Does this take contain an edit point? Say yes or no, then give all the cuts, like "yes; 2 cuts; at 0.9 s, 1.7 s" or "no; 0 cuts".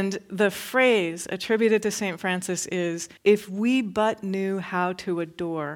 yes; 1 cut; at 3.2 s